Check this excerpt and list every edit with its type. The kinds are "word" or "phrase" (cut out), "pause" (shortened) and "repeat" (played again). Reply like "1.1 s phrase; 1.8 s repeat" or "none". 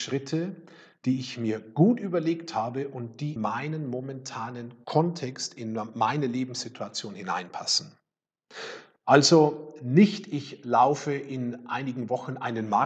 3.4 s word